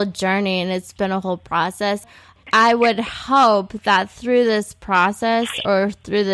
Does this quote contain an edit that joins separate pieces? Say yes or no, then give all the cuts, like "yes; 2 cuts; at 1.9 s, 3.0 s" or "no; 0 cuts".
no; 0 cuts